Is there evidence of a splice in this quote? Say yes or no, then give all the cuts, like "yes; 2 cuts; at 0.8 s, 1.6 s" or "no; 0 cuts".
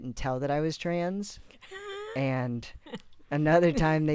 yes; 1 cut; at 2.8 s